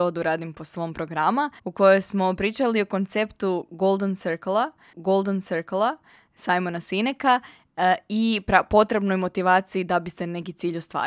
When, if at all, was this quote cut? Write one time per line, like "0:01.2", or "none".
0:01.6
0:04.9